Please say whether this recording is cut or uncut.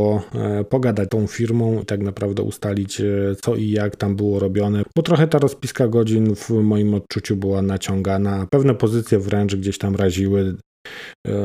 cut